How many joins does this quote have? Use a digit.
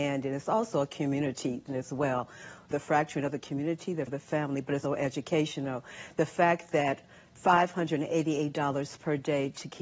4